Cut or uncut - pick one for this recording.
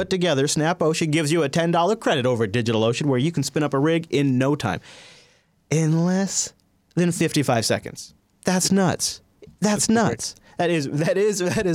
uncut